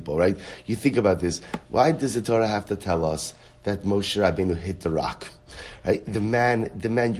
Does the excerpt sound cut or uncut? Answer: uncut